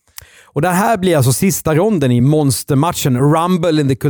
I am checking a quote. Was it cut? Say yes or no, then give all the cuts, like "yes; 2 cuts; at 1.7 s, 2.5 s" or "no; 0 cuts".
no; 0 cuts